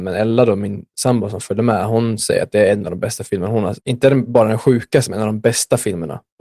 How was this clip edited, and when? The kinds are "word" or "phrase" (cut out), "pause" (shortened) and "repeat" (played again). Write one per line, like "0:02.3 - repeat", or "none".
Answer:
0:03.8 - pause